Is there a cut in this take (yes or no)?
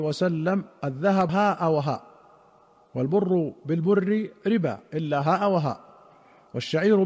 yes